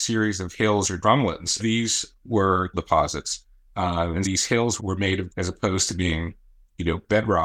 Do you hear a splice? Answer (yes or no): yes